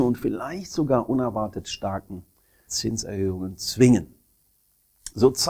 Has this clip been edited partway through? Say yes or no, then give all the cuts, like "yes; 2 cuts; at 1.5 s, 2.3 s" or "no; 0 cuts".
yes; 1 cut; at 2.7 s